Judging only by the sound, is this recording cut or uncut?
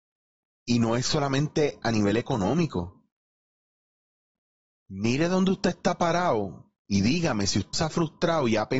cut